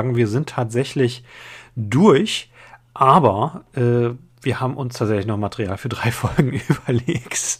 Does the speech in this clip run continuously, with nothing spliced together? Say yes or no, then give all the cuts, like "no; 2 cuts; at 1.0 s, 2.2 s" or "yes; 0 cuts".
yes; 0 cuts